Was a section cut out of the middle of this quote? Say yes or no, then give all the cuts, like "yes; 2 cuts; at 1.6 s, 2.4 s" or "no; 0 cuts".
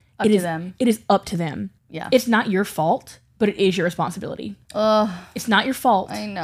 yes; 2 cuts; at 1.8 s, 4.6 s